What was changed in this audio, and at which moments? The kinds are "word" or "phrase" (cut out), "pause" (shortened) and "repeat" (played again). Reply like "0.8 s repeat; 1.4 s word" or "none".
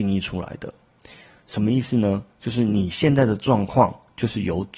2.3 s pause